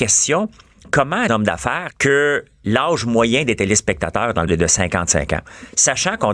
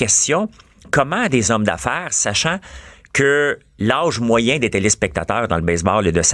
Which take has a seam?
first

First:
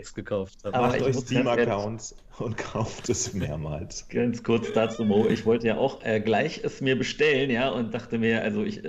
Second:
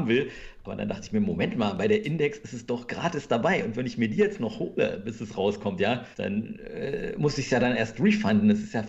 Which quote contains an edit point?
second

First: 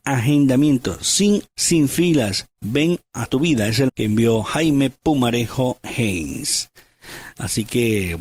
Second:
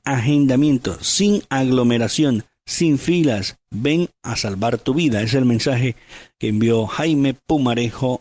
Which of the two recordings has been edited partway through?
first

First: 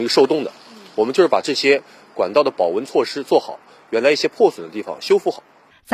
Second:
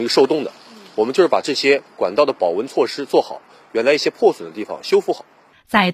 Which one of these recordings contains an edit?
second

